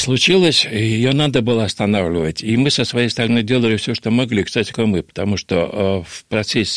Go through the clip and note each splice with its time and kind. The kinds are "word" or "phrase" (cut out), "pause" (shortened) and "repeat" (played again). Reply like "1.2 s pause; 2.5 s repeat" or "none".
4.7 s phrase